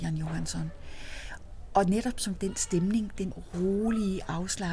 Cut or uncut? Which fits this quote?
cut